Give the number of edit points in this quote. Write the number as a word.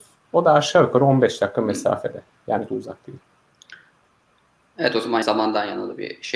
two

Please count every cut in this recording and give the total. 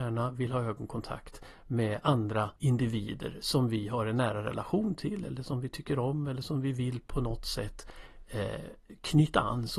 one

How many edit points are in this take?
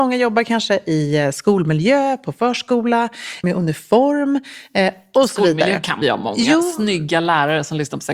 two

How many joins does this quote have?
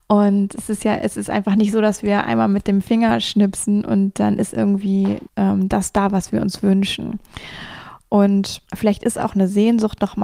two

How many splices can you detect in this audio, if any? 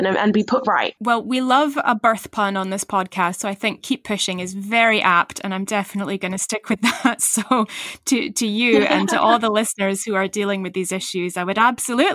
zero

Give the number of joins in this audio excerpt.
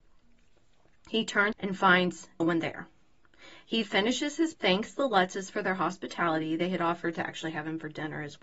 four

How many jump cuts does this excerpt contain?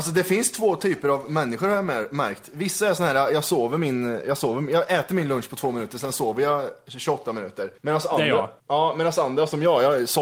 two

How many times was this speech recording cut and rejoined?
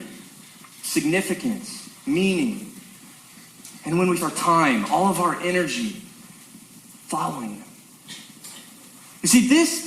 three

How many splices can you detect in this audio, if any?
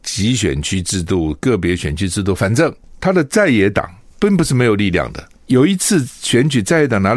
zero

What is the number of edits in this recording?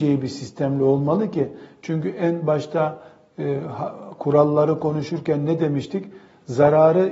zero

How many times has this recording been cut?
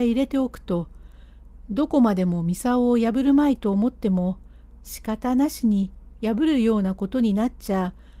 zero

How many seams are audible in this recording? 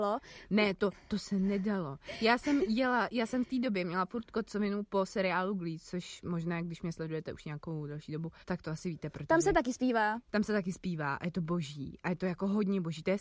one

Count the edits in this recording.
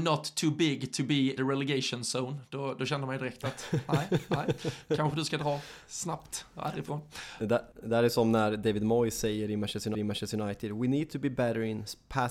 three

